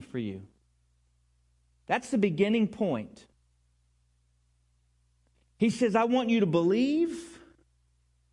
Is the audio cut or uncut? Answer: uncut